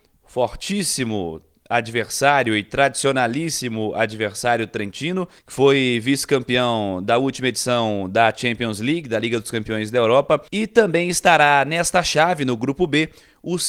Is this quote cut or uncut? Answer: cut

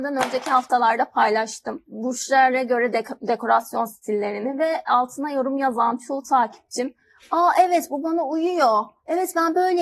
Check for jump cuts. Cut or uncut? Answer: uncut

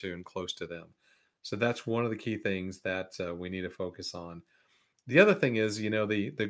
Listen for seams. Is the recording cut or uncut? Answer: uncut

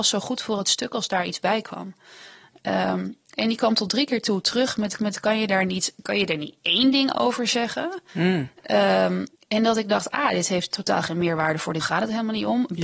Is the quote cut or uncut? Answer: cut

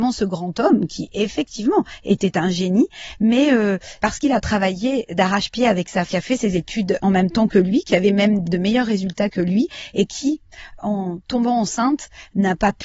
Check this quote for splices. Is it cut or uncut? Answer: cut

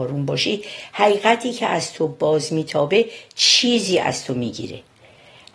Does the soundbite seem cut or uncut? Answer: uncut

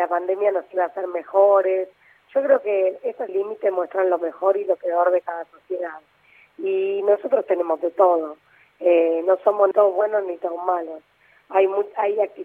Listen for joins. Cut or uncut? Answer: cut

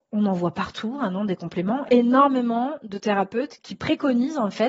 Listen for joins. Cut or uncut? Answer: cut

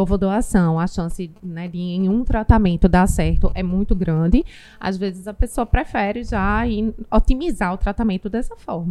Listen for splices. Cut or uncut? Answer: uncut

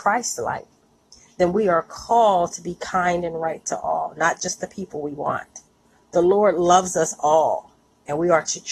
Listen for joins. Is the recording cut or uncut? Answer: uncut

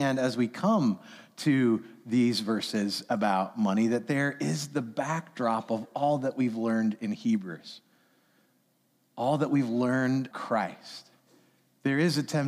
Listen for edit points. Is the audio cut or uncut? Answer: cut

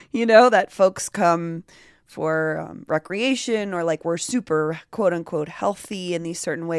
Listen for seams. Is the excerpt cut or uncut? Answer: uncut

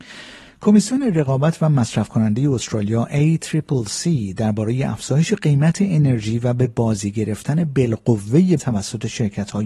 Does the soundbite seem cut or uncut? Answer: cut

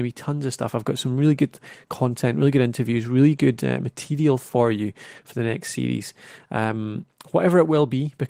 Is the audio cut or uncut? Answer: uncut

